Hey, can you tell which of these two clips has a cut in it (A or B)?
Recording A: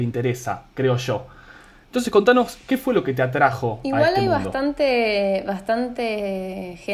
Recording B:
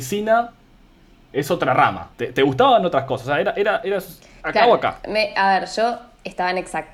B